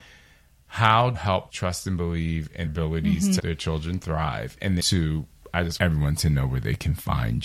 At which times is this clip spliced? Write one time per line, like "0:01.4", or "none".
0:01.1
0:01.5
0:02.7
0:03.4
0:04.8
0:05.8